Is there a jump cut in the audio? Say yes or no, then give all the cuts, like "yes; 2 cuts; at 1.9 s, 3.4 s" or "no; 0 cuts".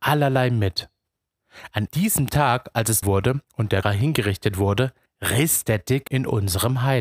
yes; 6 cuts; at 1.9 s, 3.0 s, 3.4 s, 3.8 s, 5.1 s, 6.1 s